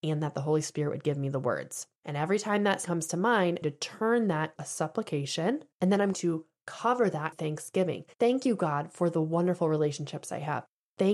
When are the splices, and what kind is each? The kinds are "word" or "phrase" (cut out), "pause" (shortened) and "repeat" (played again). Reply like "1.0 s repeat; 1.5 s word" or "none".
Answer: 2.0 s pause; 2.8 s word; 3.6 s phrase; 4.6 s word; 5.7 s pause; 6.1 s word; 7.3 s word; 8.1 s pause